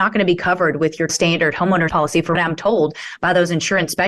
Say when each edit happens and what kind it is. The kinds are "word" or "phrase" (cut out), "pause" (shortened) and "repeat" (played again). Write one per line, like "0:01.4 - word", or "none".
0:01.1 - word
0:01.9 - word
0:02.4 - word